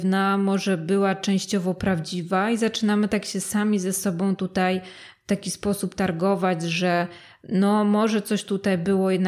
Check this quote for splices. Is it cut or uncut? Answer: uncut